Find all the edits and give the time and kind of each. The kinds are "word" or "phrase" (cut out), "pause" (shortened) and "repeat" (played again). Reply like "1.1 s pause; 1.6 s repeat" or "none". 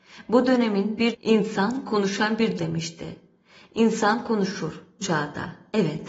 1.1 s word; 2.6 s word; 5.0 s word